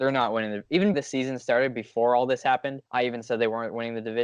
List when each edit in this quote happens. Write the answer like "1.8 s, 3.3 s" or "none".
0.9 s, 2.9 s